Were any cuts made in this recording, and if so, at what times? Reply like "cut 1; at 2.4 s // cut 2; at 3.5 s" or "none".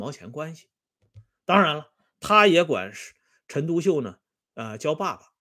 none